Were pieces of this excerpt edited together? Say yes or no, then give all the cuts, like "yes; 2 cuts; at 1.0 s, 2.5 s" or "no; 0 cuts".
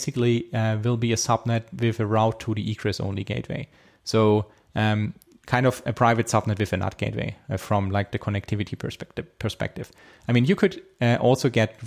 no; 0 cuts